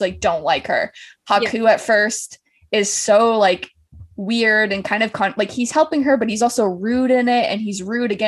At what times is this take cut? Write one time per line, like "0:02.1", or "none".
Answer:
0:04.1